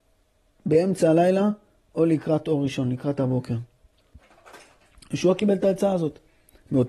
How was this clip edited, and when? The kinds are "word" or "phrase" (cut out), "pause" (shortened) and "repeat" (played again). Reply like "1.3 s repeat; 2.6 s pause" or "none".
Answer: none